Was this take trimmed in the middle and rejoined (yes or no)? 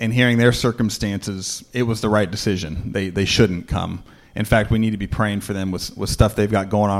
no